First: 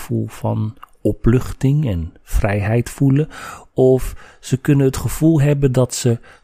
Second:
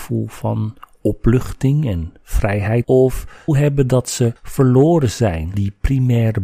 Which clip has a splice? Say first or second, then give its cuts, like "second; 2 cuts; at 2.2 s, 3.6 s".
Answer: second; 4 cuts; at 2.8 s, 3.5 s, 4.4 s, 5.5 s